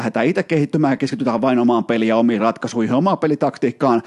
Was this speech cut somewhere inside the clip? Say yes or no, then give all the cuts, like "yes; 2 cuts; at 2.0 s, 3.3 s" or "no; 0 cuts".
no; 0 cuts